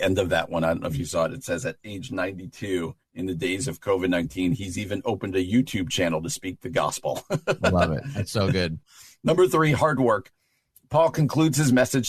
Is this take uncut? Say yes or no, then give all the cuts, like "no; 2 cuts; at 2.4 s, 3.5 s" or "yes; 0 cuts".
no; 1 cut; at 8.8 s